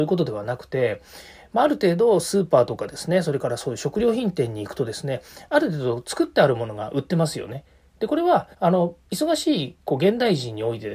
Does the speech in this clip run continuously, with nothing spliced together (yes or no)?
no